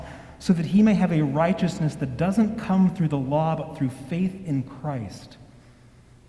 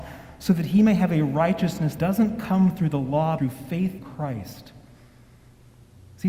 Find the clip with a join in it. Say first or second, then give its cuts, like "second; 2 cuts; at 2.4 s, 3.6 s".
second; 3 cuts; at 2.0 s, 3.4 s, 4.0 s